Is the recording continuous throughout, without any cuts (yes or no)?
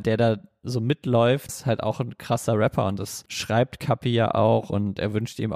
no